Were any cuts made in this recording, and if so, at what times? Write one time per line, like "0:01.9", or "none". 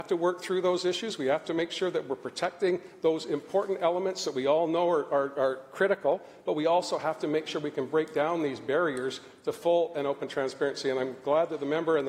none